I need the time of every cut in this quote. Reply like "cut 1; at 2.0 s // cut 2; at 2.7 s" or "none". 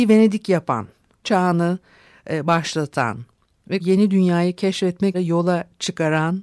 cut 1; at 1.2 s // cut 2; at 3.8 s // cut 3; at 5.1 s